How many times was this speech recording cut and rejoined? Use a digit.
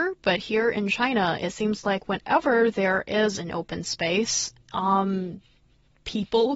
0